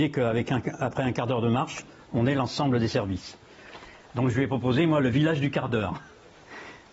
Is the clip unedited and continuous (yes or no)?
yes